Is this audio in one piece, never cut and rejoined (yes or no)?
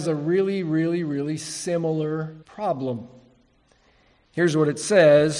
no